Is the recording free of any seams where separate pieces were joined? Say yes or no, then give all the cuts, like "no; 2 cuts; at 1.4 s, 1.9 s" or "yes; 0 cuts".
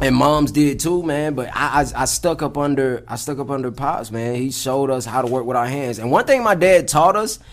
yes; 0 cuts